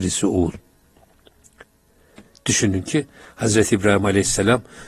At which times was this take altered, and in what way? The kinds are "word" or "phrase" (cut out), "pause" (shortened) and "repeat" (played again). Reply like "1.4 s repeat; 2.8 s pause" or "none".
none